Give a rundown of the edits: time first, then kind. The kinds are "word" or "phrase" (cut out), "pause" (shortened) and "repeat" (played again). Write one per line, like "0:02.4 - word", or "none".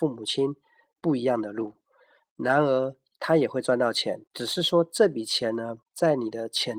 0:04.3 - pause
0:05.8 - pause